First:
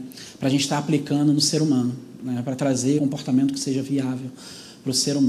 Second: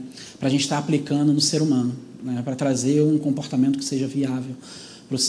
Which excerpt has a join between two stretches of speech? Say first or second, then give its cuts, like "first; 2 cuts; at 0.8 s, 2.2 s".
first; 1 cut; at 3.0 s